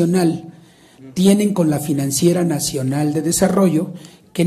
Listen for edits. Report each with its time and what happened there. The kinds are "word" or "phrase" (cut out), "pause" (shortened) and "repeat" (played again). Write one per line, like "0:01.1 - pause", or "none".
none